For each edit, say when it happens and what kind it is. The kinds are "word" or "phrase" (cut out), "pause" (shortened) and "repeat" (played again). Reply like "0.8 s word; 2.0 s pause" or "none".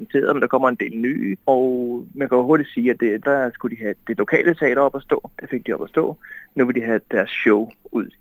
1.4 s pause; 3.2 s phrase; 5.3 s pause